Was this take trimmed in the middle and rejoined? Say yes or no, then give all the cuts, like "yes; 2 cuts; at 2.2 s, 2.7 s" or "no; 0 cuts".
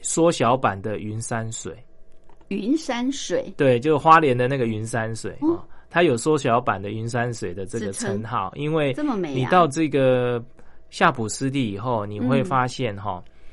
yes; 1 cut; at 5.4 s